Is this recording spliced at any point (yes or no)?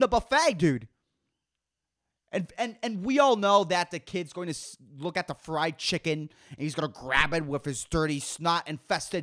no